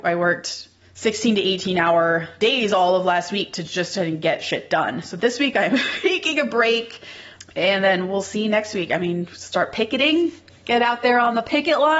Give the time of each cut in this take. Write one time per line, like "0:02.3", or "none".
none